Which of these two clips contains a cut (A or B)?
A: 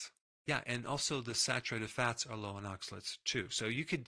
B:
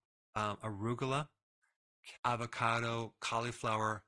B